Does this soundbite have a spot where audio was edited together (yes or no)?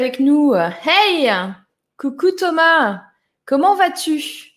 no